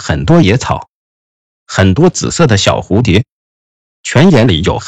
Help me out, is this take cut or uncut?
uncut